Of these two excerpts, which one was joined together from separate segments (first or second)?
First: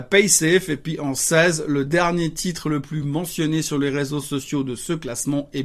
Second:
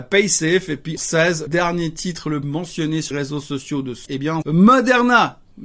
second